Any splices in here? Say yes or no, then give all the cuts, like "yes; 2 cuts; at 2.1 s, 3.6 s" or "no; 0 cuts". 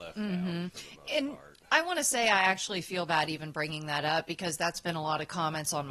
no; 0 cuts